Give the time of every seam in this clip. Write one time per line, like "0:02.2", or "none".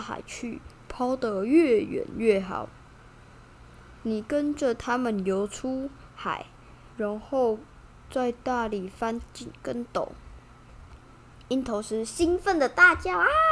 0:06.9